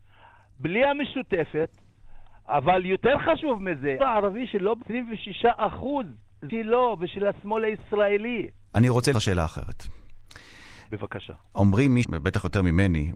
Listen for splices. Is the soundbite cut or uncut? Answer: cut